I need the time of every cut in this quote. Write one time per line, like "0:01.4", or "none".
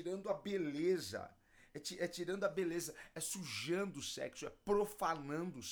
none